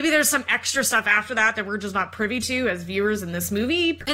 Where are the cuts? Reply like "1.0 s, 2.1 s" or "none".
none